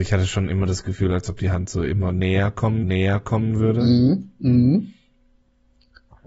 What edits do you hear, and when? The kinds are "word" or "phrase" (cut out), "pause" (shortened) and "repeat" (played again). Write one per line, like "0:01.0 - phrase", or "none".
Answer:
0:02.8 - repeat